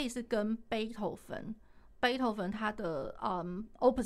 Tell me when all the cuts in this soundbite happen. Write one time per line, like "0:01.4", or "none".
none